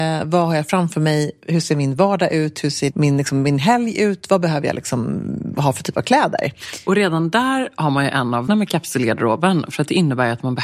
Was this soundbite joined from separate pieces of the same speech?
yes; 2 cuts; at 2.9 s, 8.5 s

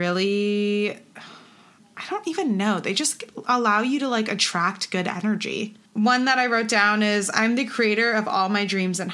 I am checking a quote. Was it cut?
yes; 1 cut; at 5.8 s

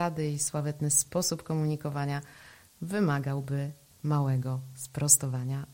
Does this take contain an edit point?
no; 0 cuts

